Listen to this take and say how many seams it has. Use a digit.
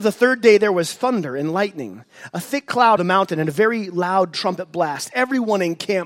1